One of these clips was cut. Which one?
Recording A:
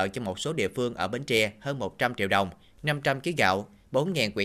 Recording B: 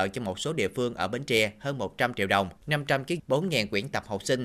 B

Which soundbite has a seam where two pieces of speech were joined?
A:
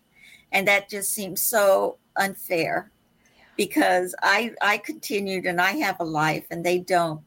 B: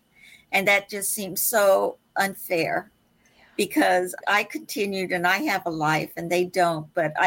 B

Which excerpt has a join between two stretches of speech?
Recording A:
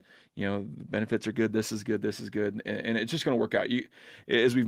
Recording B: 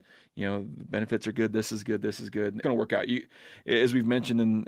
B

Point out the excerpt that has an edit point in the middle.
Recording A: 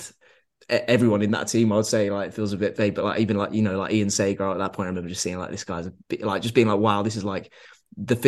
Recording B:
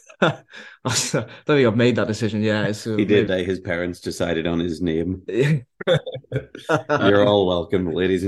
B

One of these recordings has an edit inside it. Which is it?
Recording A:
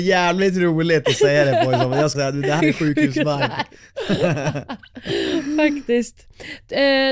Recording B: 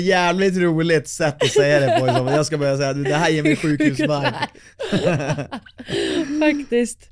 A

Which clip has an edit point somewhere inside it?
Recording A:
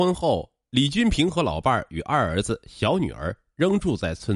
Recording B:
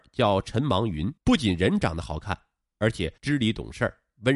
B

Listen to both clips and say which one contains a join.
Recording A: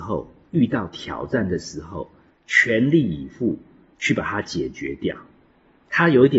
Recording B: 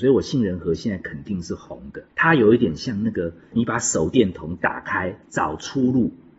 B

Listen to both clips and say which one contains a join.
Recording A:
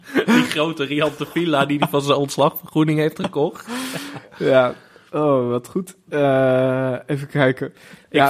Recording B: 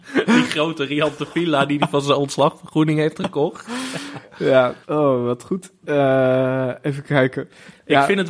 B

